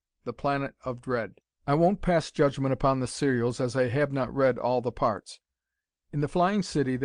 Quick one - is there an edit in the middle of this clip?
yes; 1 cut; at 1.4 s

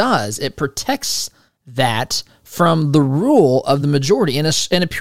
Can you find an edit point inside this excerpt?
no; 0 cuts

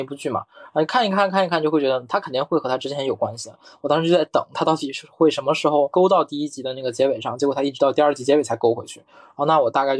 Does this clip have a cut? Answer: no; 0 cuts

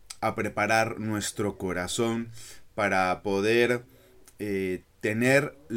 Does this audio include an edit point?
no; 0 cuts

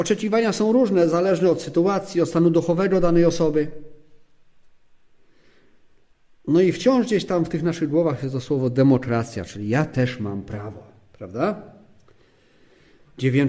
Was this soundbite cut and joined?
no; 0 cuts

